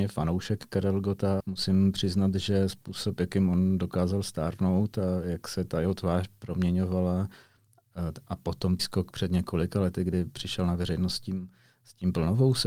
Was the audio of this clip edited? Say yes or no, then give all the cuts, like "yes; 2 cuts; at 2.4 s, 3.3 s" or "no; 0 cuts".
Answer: yes; 2 cuts; at 1.4 s, 8.8 s